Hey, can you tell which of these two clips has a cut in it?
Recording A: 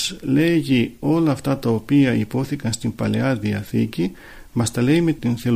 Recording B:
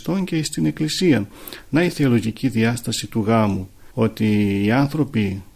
B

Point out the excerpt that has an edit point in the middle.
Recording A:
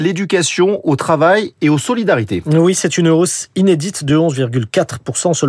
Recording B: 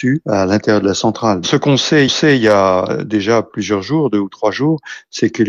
B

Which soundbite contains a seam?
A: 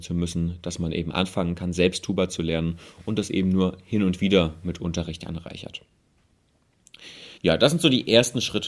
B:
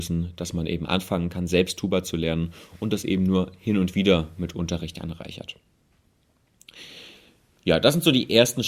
A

